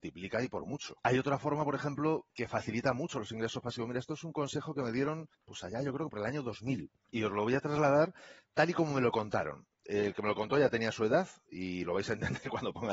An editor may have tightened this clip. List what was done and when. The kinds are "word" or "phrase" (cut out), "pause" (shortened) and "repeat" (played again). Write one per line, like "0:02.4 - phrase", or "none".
0:01.0 - pause
0:02.3 - pause
0:05.3 - pause
0:07.0 - pause